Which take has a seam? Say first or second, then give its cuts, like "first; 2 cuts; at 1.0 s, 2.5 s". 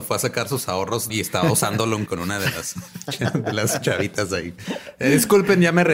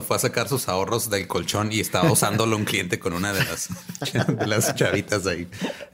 first; 2 cuts; at 1.1 s, 2.1 s